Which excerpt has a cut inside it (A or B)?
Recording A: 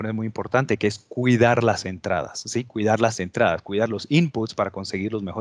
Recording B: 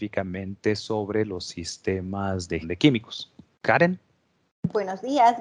B